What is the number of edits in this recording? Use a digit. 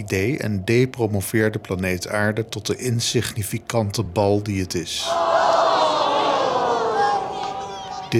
0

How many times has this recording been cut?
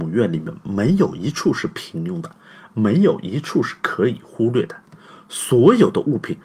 0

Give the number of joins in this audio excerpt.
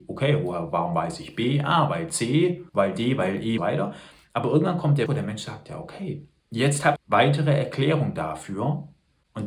5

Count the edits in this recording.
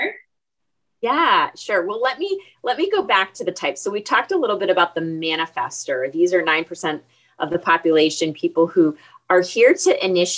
0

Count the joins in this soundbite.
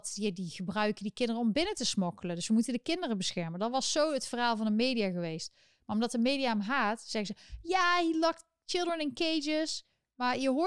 0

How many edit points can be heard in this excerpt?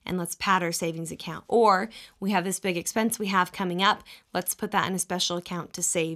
0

